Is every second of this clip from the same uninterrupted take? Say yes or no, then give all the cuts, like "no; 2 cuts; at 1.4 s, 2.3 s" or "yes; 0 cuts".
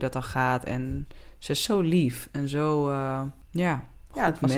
yes; 0 cuts